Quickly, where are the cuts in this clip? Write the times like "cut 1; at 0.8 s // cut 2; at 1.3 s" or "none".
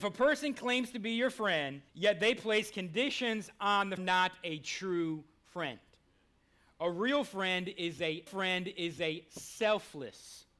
cut 1; at 1.9 s // cut 2; at 4.0 s // cut 3; at 8.3 s